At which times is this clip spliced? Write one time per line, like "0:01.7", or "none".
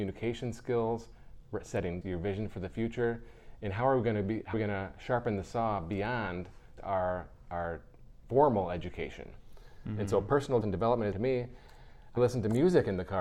0:02.0
0:04.5
0:06.8
0:10.6
0:11.1
0:12.2